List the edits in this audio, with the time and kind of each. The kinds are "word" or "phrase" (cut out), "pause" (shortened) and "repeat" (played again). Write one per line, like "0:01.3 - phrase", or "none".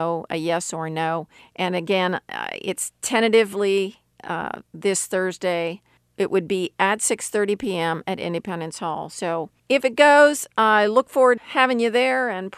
0:01.4 - pause
0:04.1 - pause
0:06.0 - pause
0:09.6 - pause
0:11.4 - word